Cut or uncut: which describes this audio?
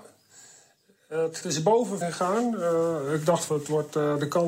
cut